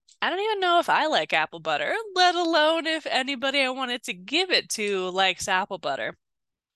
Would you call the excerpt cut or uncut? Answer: uncut